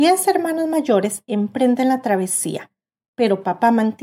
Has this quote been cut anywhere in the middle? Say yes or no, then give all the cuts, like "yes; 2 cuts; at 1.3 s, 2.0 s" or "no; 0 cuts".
no; 0 cuts